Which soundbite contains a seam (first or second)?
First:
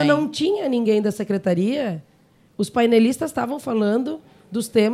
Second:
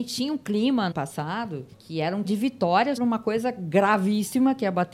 second